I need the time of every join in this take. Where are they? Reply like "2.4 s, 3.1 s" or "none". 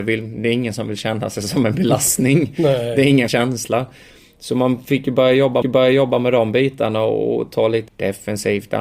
3.3 s, 5.6 s, 7.9 s